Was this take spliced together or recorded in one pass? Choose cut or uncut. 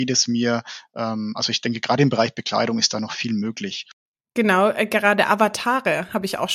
uncut